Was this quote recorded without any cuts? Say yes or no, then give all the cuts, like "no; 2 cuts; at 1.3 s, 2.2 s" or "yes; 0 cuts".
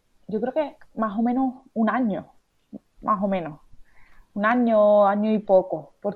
yes; 0 cuts